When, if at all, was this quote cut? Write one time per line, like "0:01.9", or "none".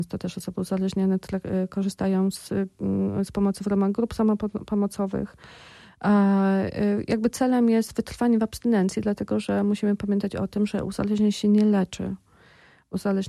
none